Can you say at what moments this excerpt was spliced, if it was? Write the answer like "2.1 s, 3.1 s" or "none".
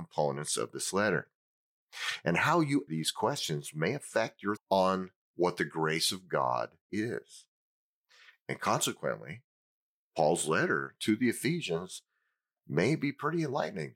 2.9 s, 4.6 s, 6.9 s